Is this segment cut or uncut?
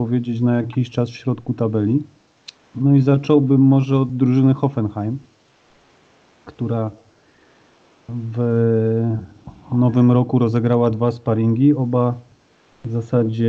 uncut